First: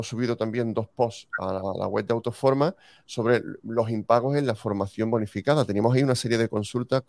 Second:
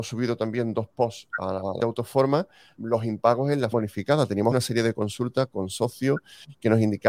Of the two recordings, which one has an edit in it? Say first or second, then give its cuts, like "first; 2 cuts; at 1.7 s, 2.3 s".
second; 4 cuts; at 1.8 s, 2.8 s, 3.7 s, 4.5 s